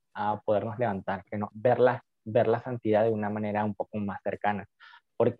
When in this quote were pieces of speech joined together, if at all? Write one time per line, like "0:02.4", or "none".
0:01.5

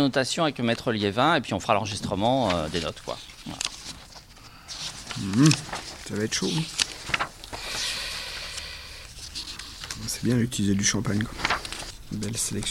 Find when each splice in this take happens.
none

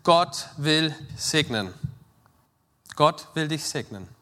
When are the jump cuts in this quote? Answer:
0:01.1

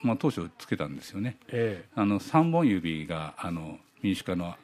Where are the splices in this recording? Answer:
none

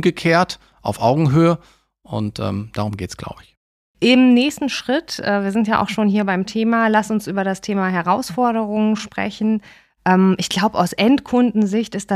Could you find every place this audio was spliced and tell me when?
none

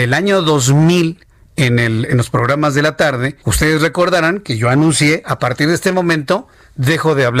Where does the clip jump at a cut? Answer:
0:03.4

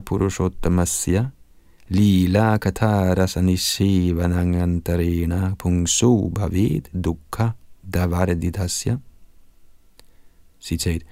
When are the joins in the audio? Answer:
0:06.9

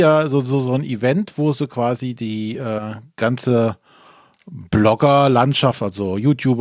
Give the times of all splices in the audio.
none

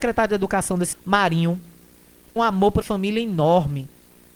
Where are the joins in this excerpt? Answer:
0:00.9
0:02.4
0:02.8

